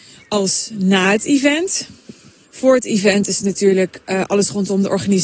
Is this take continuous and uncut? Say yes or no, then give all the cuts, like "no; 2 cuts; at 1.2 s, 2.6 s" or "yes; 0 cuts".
yes; 0 cuts